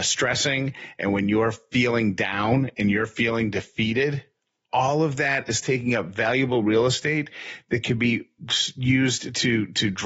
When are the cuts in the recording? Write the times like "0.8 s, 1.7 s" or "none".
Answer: none